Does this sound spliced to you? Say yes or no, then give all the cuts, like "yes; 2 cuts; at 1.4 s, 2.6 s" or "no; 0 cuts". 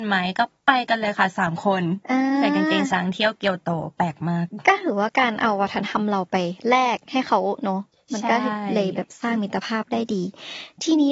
no; 0 cuts